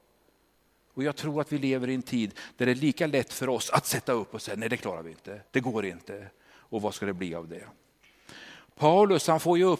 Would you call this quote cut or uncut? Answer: cut